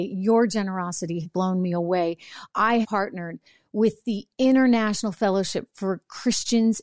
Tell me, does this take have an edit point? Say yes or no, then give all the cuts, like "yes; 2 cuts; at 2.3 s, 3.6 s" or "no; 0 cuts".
yes; 2 cuts; at 1.2 s, 2.8 s